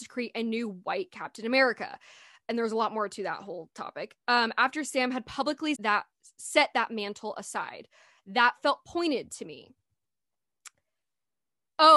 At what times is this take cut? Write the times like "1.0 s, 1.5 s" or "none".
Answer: 5.7 s